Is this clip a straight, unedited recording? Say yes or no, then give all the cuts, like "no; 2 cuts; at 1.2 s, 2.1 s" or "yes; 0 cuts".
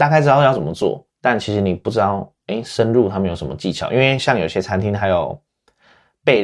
no; 1 cut; at 1.1 s